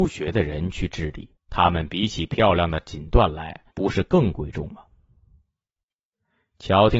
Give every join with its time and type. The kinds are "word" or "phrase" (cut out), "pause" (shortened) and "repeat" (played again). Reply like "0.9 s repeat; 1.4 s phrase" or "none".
1.4 s pause; 3.7 s pause